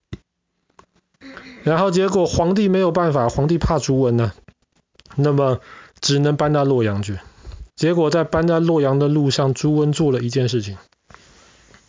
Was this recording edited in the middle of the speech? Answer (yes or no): yes